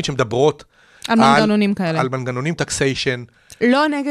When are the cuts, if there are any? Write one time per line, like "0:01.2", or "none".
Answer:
0:02.6